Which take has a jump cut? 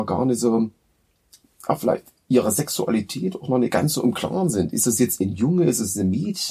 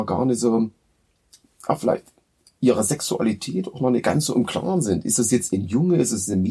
first; 1 cut; at 2.2 s

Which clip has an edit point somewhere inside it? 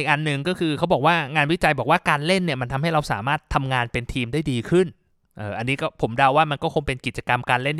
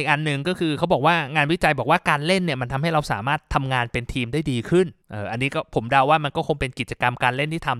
second; 1 cut; at 5.0 s

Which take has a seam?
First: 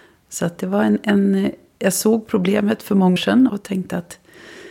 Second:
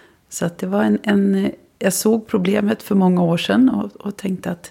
first; 2 cuts; at 3.2 s, 3.5 s

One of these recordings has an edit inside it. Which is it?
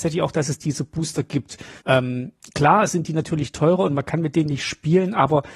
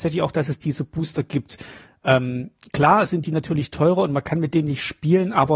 first; 1 cut; at 1.8 s

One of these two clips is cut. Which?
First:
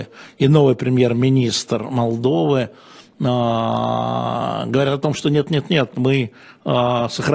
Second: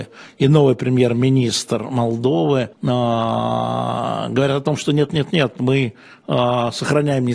second; 1 cut; at 2.7 s

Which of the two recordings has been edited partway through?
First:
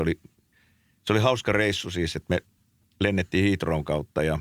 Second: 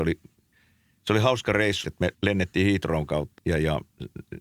second; 3 cuts; at 1.8 s, 2.1 s, 3.4 s

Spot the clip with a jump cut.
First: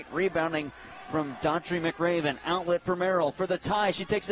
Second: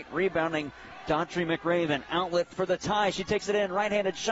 second; 2 cuts; at 1.0 s, 2.5 s

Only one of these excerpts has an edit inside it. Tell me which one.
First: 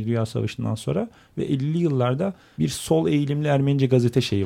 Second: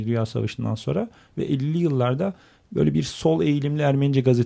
first; 1 cut; at 2.6 s

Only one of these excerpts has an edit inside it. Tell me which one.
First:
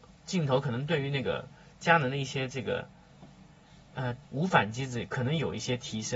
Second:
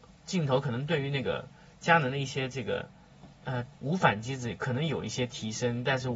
second; 1 cut; at 3.3 s

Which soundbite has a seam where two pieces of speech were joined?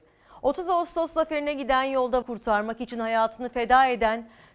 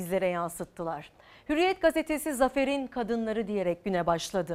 first; 1 cut; at 2.2 s

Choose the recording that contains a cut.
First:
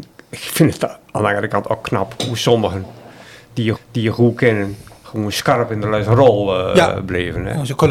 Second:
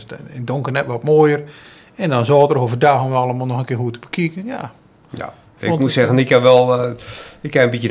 first; 1 cut; at 3.7 s

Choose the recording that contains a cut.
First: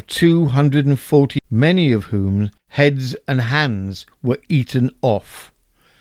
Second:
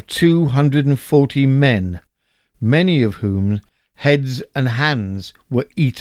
first; 2 cuts; at 1.4 s, 2.6 s

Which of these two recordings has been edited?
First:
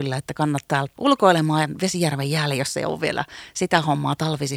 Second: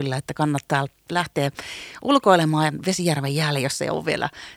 first; 1 cut; at 1.0 s

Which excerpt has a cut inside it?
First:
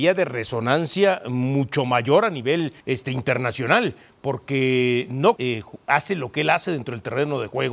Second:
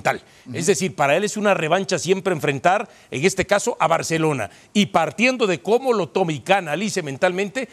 first; 2 cuts; at 2.8 s, 5.4 s

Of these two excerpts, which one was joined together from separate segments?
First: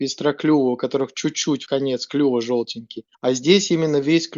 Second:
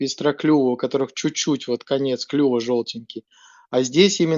first; 2 cuts; at 1.7 s, 3.1 s

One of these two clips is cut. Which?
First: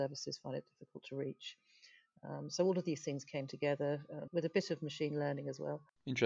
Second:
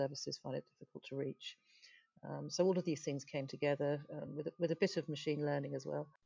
first; 1 cut; at 4.3 s

